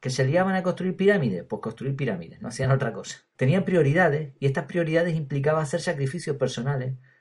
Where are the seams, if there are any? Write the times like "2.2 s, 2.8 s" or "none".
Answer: none